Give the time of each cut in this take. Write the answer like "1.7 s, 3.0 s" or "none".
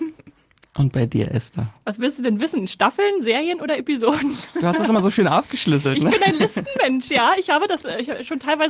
none